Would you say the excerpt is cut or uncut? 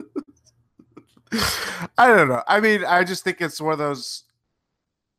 uncut